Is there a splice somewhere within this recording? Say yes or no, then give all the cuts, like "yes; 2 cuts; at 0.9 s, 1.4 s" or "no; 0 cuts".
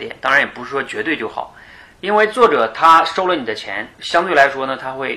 yes; 1 cut; at 3.9 s